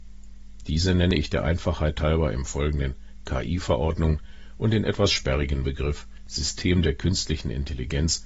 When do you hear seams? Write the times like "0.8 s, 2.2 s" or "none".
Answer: none